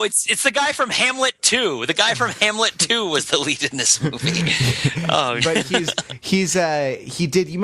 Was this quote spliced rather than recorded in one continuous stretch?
yes; 1 cut; at 5.4 s

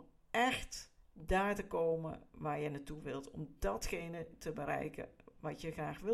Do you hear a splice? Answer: no; 0 cuts

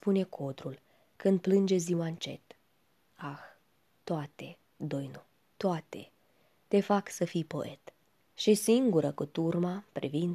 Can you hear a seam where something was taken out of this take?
no; 0 cuts

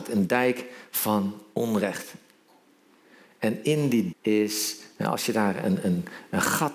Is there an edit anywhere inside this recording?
yes; 1 cut; at 4.1 s

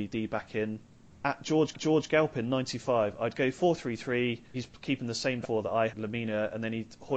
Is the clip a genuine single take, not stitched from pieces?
no; 4 cuts; at 1.7 s, 4.5 s, 5.4 s, 5.9 s

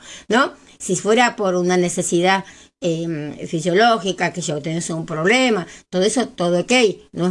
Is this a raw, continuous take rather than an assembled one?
yes; 0 cuts

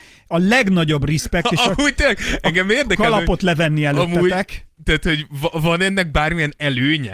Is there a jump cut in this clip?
yes; 1 cut; at 4.8 s

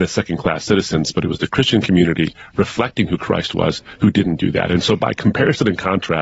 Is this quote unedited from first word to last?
yes; 0 cuts

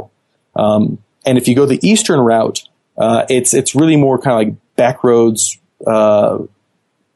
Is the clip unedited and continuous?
yes; 0 cuts

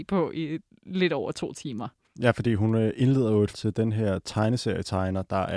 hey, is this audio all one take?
no; 1 cut; at 3.5 s

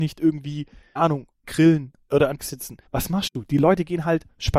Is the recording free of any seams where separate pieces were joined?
no; 4 cuts; at 1.0 s, 1.4 s, 2.4 s, 2.9 s

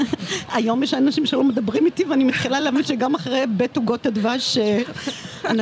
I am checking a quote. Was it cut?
no; 0 cuts

